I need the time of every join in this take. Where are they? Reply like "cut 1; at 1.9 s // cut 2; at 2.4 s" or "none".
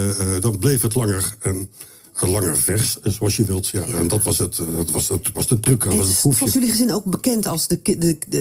cut 1; at 1.4 s // cut 2; at 5.3 s // cut 3; at 6.5 s